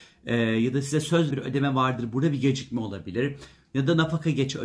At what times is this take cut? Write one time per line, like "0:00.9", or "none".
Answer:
0:01.3